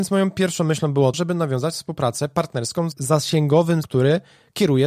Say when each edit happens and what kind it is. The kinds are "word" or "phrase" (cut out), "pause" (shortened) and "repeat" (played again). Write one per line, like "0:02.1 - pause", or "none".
0:01.1 - word
0:02.9 - word
0:03.8 - word